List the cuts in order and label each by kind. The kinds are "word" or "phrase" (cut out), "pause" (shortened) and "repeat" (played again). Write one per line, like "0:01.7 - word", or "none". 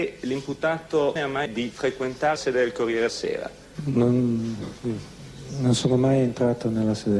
0:01.2 - word
0:01.5 - phrase
0:02.4 - phrase
0:03.1 - word